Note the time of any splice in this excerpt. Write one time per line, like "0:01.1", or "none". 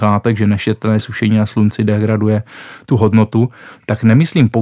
none